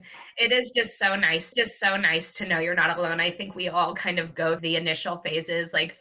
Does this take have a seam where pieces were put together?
yes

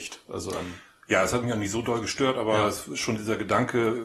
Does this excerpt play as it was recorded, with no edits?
yes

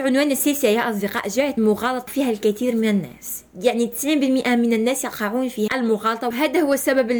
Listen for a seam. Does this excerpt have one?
yes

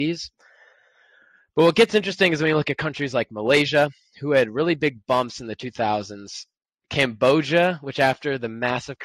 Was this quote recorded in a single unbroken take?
yes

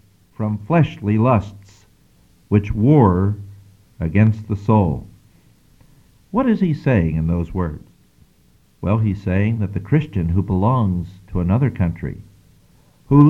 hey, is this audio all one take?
yes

